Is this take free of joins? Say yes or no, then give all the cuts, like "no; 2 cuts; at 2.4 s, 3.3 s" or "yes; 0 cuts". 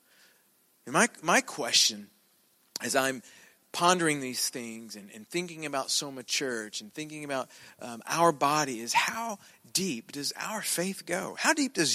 yes; 0 cuts